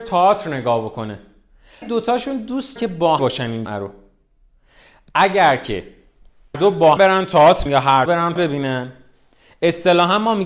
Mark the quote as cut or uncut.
cut